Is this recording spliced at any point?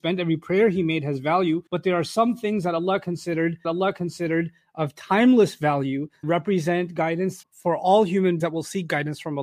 yes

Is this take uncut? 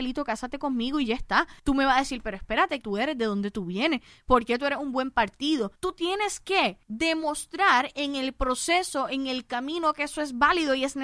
no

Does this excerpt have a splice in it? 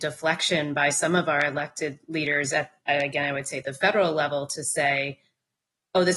no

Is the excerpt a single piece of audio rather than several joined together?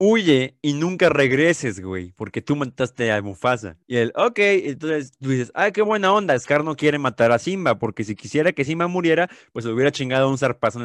no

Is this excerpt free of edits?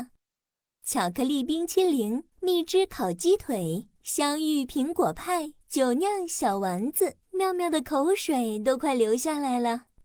no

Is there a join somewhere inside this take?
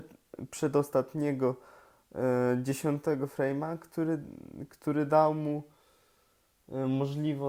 no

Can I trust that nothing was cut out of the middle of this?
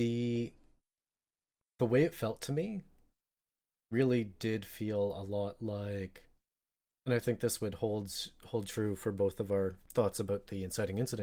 yes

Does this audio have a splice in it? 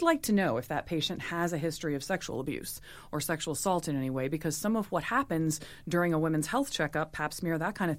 no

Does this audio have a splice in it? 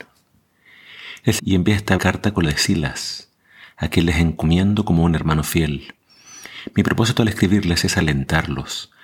yes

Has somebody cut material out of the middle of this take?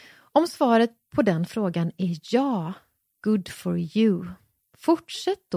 no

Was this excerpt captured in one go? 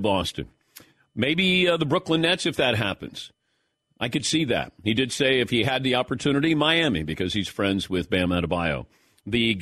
yes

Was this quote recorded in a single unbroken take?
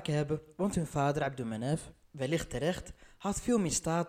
no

